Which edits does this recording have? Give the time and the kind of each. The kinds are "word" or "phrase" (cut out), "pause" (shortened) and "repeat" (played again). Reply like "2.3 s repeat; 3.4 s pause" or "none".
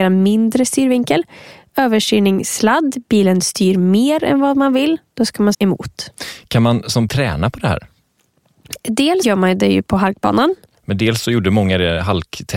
5.5 s word; 7.1 s word; 9.2 s word